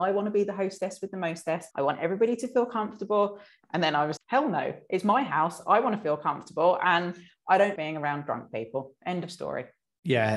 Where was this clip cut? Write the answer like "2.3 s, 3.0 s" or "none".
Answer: 1.7 s, 4.2 s, 7.8 s